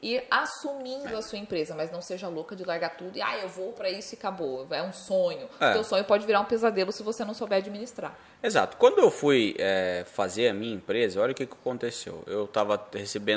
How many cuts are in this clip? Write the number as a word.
zero